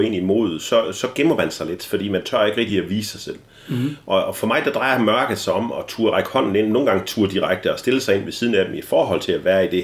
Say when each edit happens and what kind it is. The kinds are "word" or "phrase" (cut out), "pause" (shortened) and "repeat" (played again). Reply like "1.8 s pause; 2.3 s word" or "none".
none